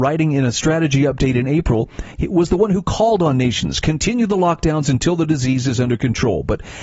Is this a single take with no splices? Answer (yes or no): yes